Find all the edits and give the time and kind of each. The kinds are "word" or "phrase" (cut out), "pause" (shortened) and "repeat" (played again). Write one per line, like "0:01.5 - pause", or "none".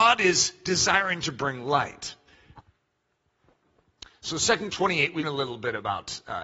0:04.7 - word
0:05.2 - word